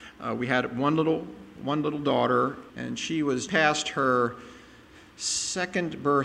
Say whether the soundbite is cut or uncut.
cut